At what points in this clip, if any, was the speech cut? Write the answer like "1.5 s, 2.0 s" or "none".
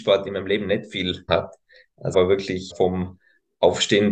1.3 s, 2.1 s, 2.7 s